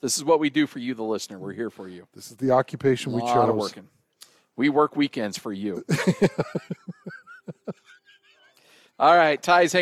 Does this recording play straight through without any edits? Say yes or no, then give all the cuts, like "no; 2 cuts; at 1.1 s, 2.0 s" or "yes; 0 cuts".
yes; 0 cuts